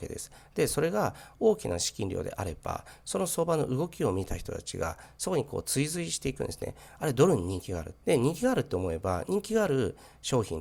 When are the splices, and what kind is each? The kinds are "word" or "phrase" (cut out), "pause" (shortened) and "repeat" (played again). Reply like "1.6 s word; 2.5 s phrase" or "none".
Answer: 8.0 s pause